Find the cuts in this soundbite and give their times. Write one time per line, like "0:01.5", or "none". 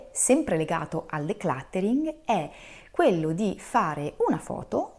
none